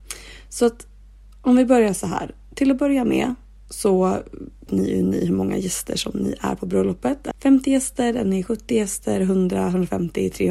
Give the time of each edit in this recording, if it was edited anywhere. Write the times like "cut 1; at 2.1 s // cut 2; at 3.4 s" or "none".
cut 1; at 4.7 s // cut 2; at 7.3 s

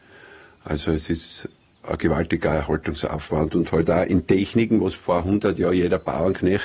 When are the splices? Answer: none

